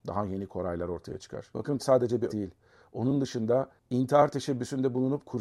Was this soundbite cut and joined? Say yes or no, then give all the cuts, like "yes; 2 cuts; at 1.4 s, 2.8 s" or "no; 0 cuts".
yes; 2 cuts; at 1.8 s, 2.3 s